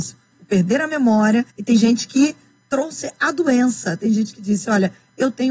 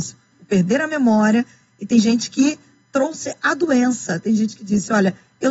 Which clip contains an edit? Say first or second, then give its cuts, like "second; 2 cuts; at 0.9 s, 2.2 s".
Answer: first; 1 cut; at 1.5 s